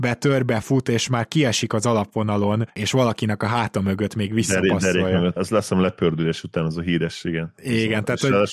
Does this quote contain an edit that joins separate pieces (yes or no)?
yes